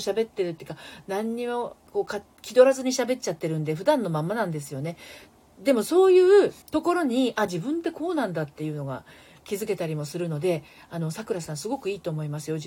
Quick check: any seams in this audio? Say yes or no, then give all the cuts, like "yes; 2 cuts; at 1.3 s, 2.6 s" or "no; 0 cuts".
yes; 3 cuts; at 1.9 s, 2.3 s, 6.6 s